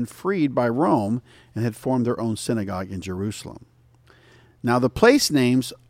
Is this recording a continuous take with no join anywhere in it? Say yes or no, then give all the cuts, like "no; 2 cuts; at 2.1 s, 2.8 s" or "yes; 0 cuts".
yes; 0 cuts